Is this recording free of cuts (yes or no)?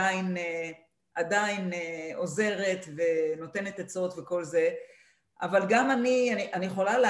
yes